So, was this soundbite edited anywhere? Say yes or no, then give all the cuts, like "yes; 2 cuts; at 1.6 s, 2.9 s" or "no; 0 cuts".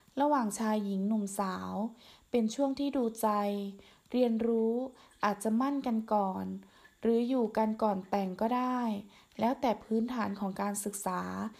no; 0 cuts